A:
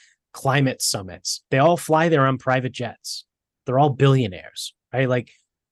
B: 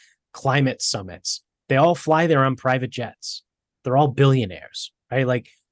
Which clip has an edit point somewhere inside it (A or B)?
A